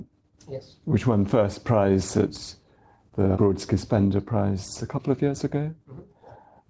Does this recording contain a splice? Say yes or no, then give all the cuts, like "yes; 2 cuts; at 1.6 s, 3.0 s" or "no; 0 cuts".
yes; 1 cut; at 3.3 s